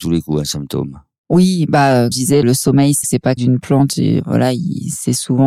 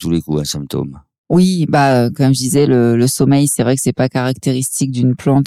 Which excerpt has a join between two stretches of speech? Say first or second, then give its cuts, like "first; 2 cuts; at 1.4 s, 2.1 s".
first; 4 cuts; at 2.1 s, 2.4 s, 3.0 s, 3.4 s